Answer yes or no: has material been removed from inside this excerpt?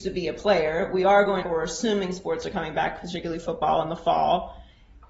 yes